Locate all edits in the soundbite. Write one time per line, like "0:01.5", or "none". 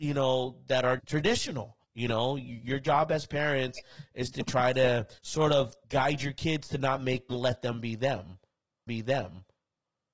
0:01.0
0:01.8
0:05.2
0:05.8
0:07.3
0:08.9

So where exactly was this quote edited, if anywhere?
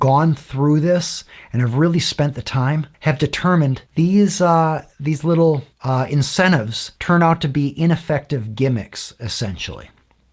0:02.9
0:03.9
0:04.9
0:05.7
0:07.0

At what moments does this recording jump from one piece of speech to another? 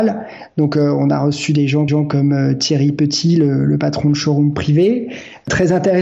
0:01.9

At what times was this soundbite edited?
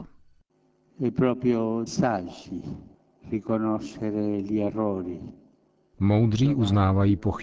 0:01.9
0:02.9

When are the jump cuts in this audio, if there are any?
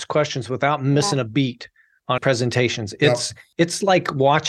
0:02.2

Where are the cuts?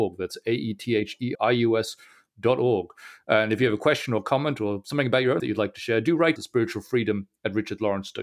0:01.3
0:05.4
0:06.4

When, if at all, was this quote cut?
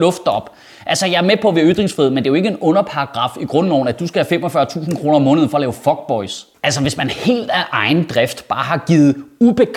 none

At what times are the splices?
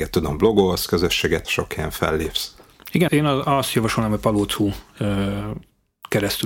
0:01.4
0:03.1

